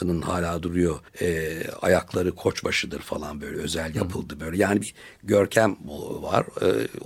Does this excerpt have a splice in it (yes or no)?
yes